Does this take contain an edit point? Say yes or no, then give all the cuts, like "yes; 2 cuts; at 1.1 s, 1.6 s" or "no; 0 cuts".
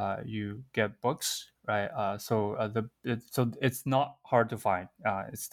no; 0 cuts